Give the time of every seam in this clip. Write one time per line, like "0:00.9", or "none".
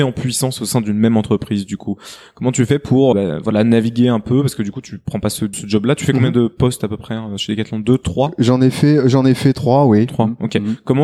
0:03.1
0:05.5